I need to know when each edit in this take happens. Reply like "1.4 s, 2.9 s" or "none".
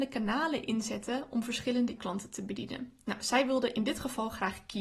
2.0 s